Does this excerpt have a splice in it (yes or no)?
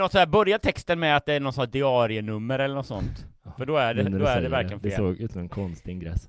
no